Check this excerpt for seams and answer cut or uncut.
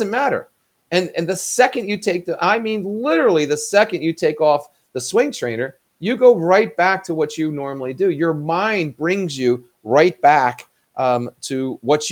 uncut